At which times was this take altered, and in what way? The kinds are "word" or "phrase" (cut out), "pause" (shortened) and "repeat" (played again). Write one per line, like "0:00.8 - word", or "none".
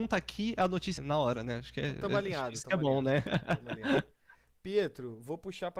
0:01.0 - word